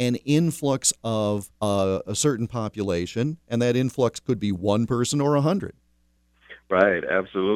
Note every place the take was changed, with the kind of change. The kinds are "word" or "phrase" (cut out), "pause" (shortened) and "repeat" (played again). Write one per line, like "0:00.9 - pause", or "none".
0:01.6 - pause